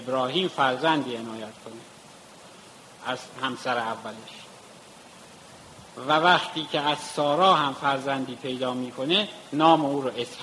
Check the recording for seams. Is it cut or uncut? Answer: uncut